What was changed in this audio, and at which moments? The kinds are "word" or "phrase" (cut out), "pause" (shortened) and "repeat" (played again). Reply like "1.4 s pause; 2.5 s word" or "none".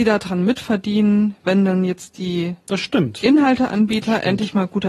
none